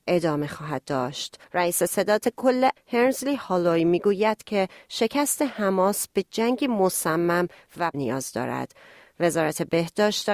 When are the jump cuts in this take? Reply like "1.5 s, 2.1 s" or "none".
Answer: 1.4 s, 2.8 s, 7.9 s